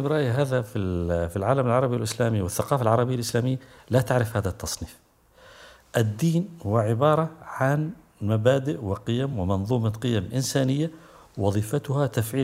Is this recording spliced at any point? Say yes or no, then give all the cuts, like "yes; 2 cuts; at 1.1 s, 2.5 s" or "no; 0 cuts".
no; 0 cuts